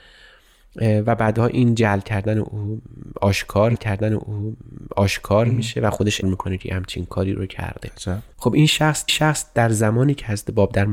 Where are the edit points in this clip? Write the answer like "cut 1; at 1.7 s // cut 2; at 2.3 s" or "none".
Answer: cut 1; at 3.8 s // cut 2; at 6.2 s // cut 3; at 8.3 s // cut 4; at 9.1 s

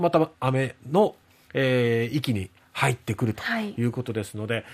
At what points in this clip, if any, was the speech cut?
none

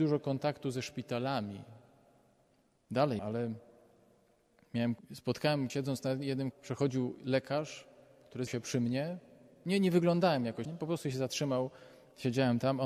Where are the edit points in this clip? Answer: cut 1; at 3.2 s // cut 2; at 5.0 s // cut 3; at 5.7 s // cut 4; at 6.5 s // cut 5; at 8.5 s // cut 6; at 10.6 s

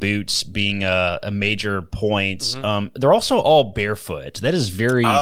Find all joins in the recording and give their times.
none

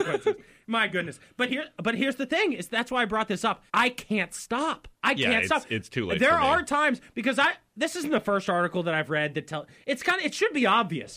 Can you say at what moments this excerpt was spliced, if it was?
cut 1; at 3.7 s // cut 2; at 4.9 s

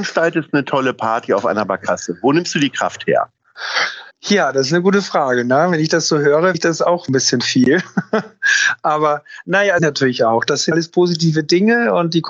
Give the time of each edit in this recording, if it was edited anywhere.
cut 1; at 4.1 s // cut 2; at 6.5 s // cut 3; at 9.8 s // cut 4; at 10.7 s

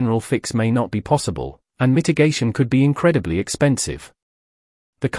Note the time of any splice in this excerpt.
none

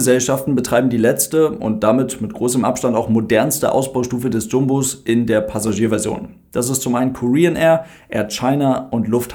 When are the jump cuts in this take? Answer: none

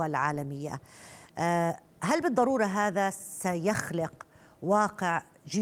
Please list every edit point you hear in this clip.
none

